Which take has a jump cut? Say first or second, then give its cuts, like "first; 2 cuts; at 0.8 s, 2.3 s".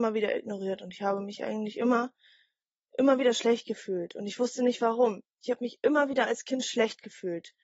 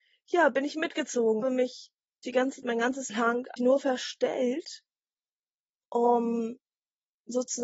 second; 5 cuts; at 1.4 s, 2.2 s, 2.6 s, 3.1 s, 3.6 s